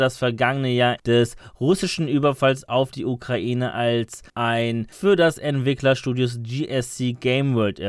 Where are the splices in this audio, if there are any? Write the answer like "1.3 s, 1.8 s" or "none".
1.0 s, 4.9 s